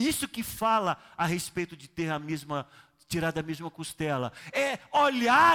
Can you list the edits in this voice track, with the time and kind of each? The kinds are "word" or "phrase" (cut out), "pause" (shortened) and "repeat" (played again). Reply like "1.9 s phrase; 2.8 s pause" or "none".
none